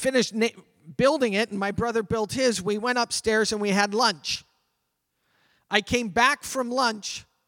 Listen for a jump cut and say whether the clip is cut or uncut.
uncut